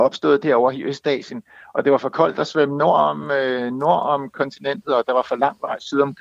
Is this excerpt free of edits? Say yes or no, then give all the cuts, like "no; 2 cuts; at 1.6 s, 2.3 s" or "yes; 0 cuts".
yes; 0 cuts